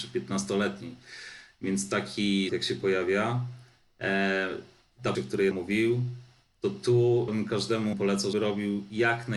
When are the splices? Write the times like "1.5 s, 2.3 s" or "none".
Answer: 2.5 s, 5.1 s, 5.5 s, 7.3 s, 7.9 s, 8.3 s